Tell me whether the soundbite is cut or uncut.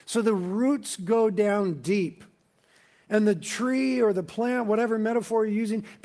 uncut